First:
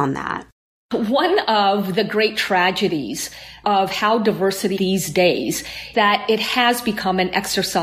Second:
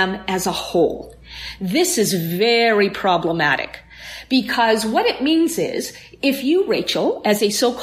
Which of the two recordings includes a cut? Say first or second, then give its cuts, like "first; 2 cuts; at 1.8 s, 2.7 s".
first; 2 cuts; at 4.8 s, 5.9 s